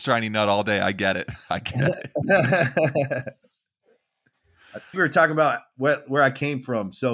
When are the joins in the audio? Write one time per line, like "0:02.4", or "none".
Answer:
0:04.9